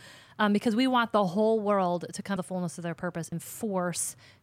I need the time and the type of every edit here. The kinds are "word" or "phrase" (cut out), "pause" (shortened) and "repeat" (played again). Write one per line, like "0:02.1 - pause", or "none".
0:02.4 - word
0:03.3 - word